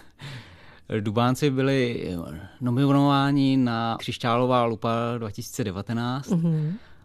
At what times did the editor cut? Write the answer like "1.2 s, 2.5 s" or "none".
4.0 s